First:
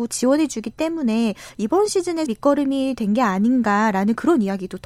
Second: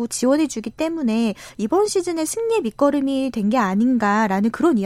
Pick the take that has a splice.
first; 1 cut; at 2.3 s

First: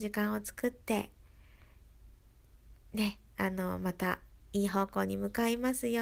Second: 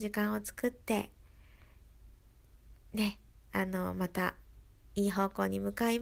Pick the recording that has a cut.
first; 2 cuts; at 3.3 s, 4.4 s

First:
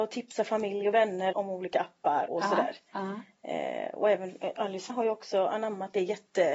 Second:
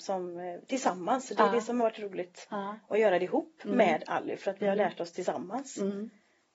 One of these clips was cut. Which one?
first; 3 cuts; at 1.3 s, 2.3 s, 4.9 s

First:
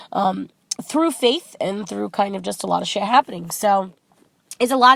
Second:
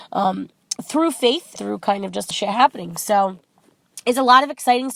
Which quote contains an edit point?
second; 2 cuts; at 1.6 s, 2.3 s

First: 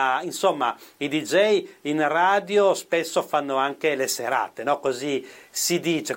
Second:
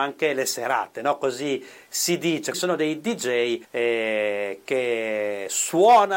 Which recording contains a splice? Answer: second; 2 cuts; at 2.5 s, 3.6 s

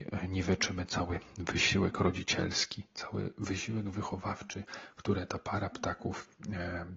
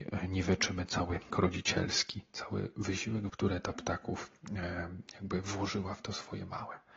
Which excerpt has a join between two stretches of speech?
second; 3 cuts; at 1.3 s, 3.3 s, 3.7 s

